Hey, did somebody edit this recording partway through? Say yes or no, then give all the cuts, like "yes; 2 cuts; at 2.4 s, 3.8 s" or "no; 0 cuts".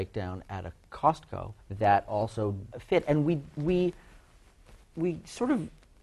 yes; 2 cuts; at 1.6 s, 2.7 s